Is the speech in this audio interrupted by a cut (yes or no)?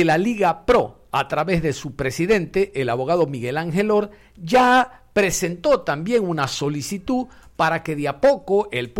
no